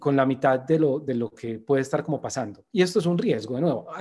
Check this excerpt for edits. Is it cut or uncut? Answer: uncut